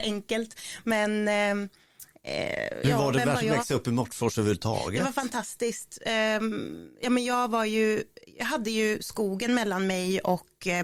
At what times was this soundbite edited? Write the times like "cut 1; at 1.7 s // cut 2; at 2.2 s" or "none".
cut 1; at 2.8 s